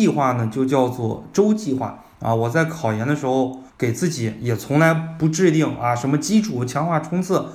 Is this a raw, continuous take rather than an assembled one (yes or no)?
no